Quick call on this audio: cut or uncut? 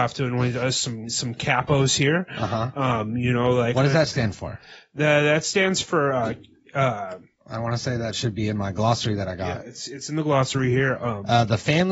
uncut